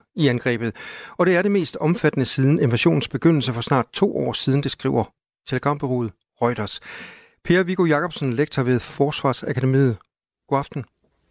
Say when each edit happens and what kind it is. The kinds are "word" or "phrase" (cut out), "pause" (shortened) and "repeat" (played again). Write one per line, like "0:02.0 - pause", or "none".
none